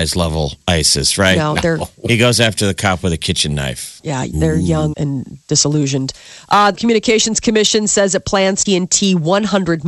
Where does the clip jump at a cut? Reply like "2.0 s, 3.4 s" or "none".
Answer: 4.9 s, 6.7 s, 8.7 s